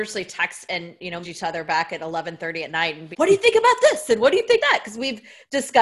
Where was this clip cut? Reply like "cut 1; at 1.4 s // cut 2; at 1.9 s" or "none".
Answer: cut 1; at 1.2 s // cut 2; at 3.1 s // cut 3; at 4.6 s